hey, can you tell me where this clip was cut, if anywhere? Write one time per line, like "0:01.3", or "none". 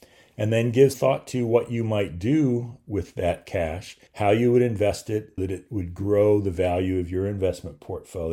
0:00.9
0:04.1
0:05.4